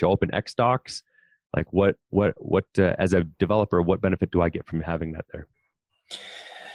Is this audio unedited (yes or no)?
yes